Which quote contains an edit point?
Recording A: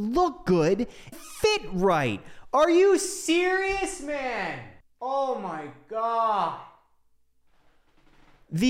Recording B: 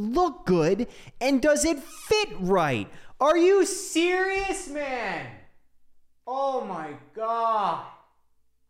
A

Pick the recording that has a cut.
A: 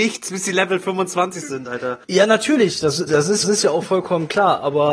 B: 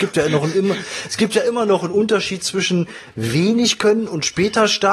A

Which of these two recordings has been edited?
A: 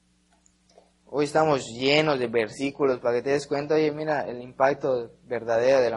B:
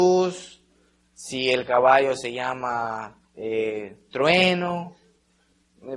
B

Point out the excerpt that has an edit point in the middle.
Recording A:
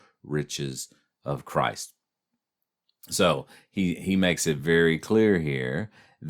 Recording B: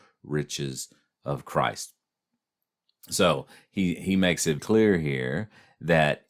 B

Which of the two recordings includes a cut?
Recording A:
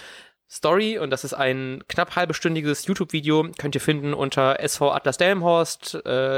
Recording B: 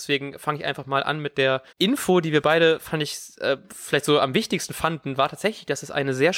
B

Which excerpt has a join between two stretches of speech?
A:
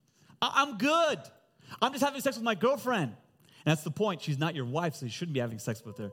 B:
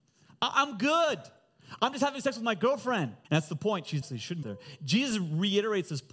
B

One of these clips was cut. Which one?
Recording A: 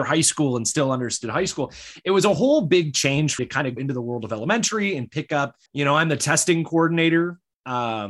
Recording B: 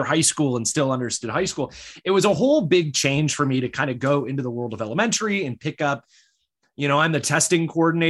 A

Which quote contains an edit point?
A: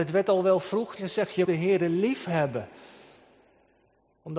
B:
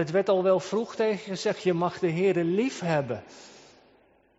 A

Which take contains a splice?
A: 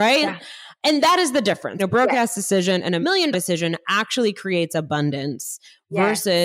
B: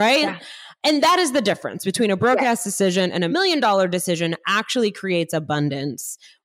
A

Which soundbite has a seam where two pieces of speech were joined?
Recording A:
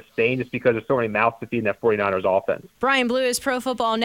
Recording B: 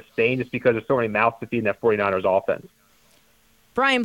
A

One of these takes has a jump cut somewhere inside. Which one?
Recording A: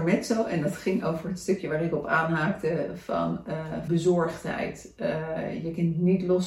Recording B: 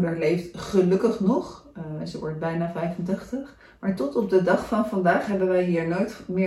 A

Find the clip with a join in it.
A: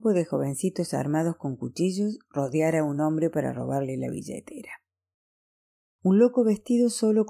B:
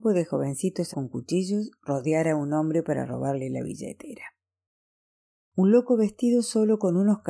B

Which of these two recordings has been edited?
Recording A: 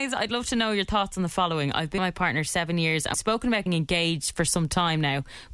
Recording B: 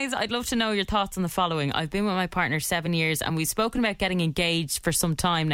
A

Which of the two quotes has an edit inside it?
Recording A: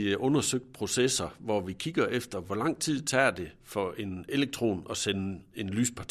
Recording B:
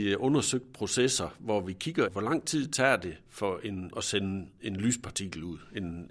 B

